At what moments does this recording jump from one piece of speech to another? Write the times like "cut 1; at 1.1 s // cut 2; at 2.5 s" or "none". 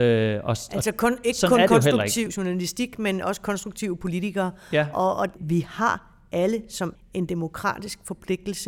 cut 1; at 6.9 s